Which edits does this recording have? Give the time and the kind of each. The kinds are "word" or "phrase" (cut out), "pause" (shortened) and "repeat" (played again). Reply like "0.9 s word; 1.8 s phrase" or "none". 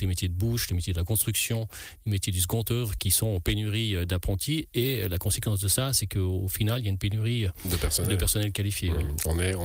3.0 s word